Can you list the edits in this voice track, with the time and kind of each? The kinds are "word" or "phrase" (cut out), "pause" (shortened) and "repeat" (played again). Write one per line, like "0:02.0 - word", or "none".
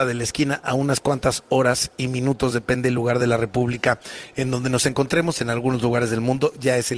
none